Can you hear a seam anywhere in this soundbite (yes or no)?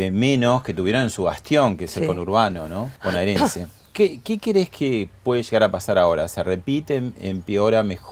yes